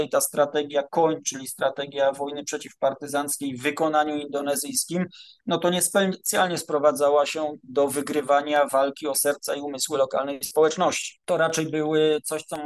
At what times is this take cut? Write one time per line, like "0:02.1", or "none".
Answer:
0:11.2